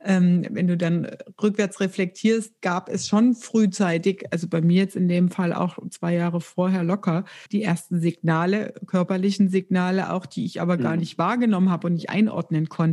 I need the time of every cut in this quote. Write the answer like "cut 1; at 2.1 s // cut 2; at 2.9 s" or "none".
cut 1; at 2.6 s // cut 2; at 7.5 s